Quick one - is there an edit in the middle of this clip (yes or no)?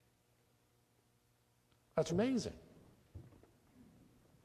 yes